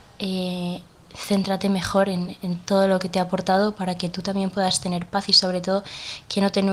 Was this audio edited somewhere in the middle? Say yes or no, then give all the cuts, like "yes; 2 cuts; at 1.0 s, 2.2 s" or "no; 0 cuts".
no; 0 cuts